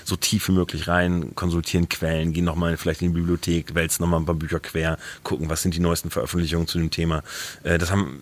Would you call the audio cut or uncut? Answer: uncut